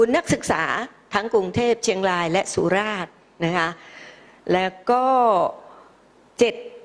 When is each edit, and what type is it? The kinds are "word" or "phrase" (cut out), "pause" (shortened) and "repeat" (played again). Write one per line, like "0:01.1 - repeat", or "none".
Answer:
none